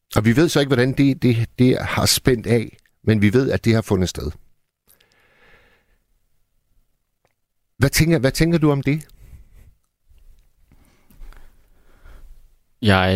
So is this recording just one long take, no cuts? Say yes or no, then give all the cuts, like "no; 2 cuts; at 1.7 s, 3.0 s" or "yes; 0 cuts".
yes; 0 cuts